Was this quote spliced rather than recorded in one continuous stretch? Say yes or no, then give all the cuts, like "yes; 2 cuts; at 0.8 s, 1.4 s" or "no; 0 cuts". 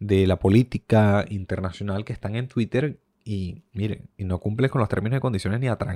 yes; 1 cut; at 3.7 s